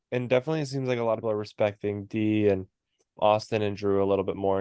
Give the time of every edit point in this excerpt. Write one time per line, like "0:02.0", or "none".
0:01.2
0:03.2